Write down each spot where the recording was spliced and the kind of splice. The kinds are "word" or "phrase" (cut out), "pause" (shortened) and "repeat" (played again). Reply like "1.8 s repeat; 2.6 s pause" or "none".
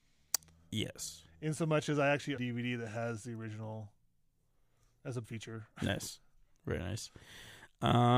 2.4 s phrase; 5.2 s word